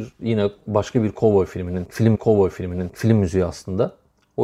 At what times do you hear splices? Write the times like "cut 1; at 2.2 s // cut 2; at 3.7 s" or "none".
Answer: cut 1; at 2.1 s